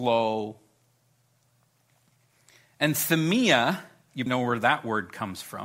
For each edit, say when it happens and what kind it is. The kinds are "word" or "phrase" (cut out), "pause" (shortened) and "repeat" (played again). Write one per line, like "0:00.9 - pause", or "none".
0:04.3 - word